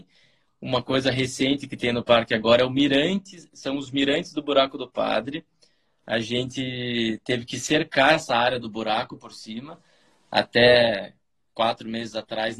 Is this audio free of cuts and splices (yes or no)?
yes